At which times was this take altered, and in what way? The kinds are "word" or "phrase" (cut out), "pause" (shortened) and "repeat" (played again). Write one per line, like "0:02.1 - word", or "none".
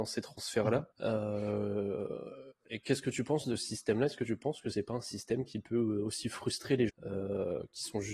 0:00.9 - pause
0:06.9 - word